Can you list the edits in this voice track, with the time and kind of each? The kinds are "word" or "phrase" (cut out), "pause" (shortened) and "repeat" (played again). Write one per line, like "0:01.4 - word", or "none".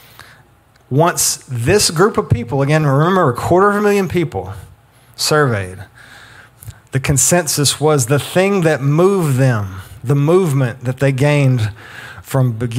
none

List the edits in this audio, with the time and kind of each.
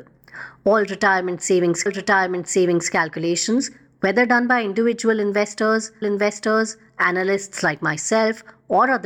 0:01.9 - repeat
0:06.0 - repeat

